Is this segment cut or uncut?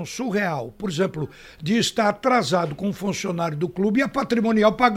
uncut